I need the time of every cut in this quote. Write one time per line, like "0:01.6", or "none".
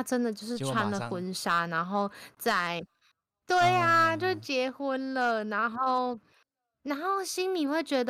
none